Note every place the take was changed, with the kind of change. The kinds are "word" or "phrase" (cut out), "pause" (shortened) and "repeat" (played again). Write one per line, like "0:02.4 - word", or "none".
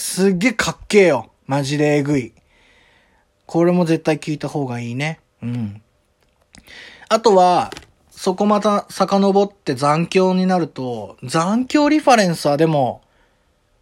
none